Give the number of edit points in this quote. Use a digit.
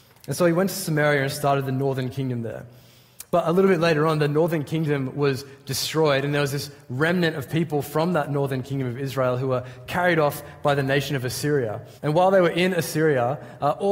1